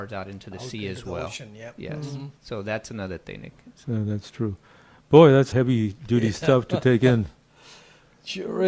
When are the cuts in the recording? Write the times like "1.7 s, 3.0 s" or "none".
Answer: 2.4 s, 3.8 s, 5.5 s